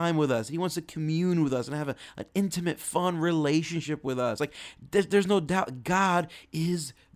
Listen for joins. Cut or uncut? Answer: uncut